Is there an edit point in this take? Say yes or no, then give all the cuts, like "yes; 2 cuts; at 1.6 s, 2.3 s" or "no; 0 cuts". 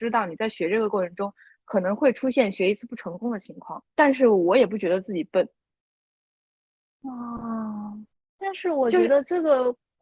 yes; 2 cuts; at 3.9 s, 8.1 s